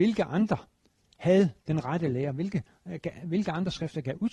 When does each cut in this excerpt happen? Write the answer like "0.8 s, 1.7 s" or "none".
1.6 s